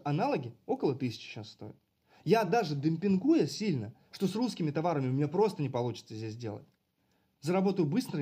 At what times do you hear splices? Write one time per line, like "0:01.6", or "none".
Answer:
none